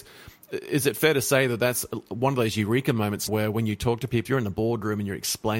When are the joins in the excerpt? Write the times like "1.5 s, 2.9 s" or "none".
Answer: 3.3 s, 4.3 s